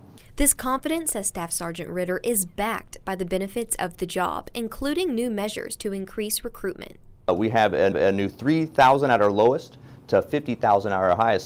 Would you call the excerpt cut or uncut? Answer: cut